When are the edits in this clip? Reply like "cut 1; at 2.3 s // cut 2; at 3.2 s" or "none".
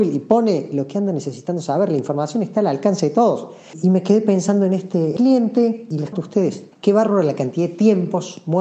cut 1; at 5.2 s // cut 2; at 6.1 s // cut 3; at 6.7 s